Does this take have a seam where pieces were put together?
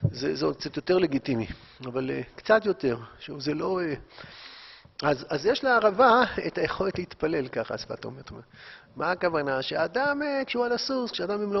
no; 0 cuts

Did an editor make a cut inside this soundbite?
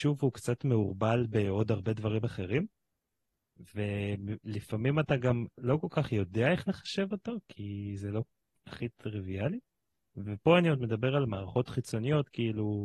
no; 0 cuts

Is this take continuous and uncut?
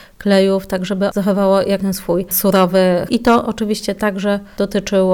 no; 3 cuts; at 1.1 s, 1.8 s, 3.1 s

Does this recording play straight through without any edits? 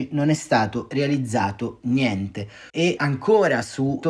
no; 1 cut; at 2.7 s

